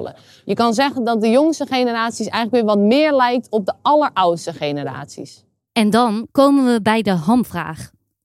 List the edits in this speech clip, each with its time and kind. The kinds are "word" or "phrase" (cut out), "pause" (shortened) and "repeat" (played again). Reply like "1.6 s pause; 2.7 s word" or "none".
none